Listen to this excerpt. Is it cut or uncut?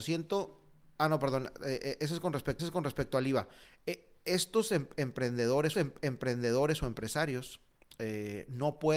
cut